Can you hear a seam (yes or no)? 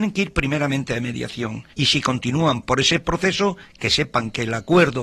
yes